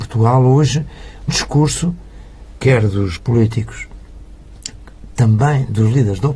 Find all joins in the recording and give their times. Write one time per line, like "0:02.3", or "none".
0:01.3
0:03.2
0:04.7